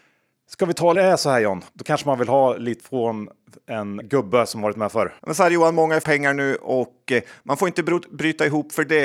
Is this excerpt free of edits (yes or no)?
no